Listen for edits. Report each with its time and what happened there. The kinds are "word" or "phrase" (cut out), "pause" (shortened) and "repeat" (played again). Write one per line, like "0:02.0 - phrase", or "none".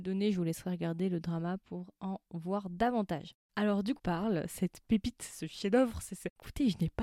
0:04.0 - phrase